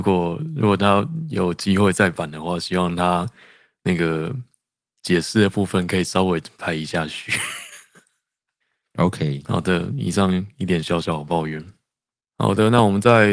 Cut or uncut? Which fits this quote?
uncut